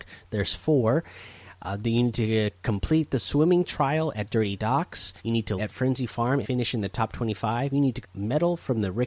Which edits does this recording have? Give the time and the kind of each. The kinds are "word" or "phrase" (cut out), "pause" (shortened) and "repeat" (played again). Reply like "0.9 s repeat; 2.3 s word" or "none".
5.2 s pause; 5.6 s word; 6.4 s word; 8.0 s word